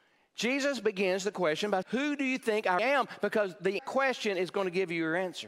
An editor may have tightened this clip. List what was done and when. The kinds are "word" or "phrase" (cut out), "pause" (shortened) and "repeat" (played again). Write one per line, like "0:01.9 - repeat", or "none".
0:01.8 - word
0:02.8 - word
0:03.8 - phrase